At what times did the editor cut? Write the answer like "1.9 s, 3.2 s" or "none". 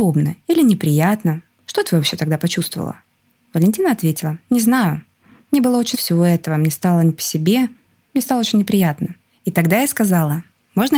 5.9 s